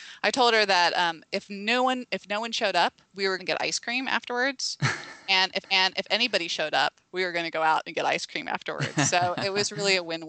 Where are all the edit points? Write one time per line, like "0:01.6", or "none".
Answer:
0:03.1
0:03.4
0:05.6